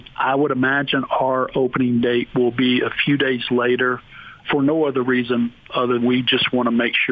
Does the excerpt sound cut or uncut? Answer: cut